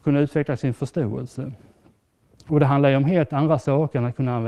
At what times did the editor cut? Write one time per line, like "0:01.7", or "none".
none